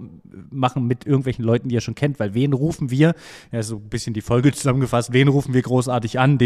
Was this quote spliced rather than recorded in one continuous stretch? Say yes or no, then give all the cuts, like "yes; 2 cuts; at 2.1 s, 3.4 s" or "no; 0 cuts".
no; 0 cuts